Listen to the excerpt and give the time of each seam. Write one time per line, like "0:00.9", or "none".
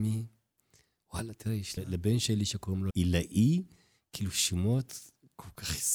0:01.8
0:02.9